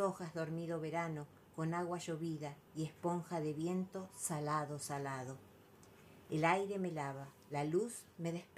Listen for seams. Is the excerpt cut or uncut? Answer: uncut